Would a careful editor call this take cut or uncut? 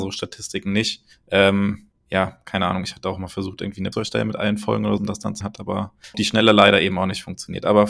cut